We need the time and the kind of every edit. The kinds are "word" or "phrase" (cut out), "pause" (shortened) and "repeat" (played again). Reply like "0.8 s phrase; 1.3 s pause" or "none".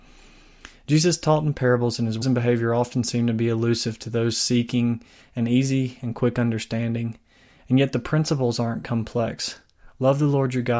2.2 s word